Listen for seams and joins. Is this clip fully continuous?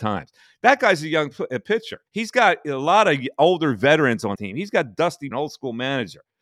no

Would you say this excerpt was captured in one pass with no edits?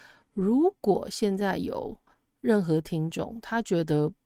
yes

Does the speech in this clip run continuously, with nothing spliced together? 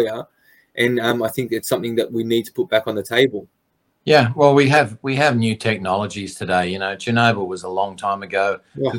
yes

